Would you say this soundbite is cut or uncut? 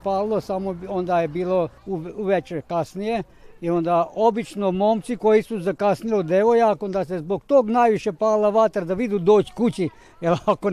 cut